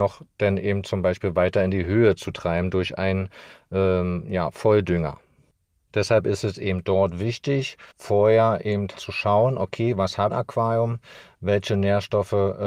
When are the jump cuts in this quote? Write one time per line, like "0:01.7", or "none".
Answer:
0:07.9
0:09.0
0:10.3